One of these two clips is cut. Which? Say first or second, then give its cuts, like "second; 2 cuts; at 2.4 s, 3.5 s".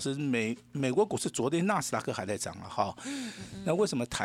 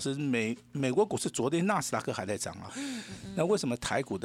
second; 1 cut; at 2.7 s